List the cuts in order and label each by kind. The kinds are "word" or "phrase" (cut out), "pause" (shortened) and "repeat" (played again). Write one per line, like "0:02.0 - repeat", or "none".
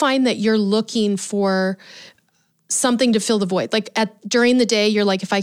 none